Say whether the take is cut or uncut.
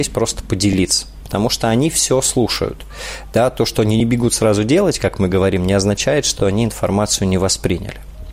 uncut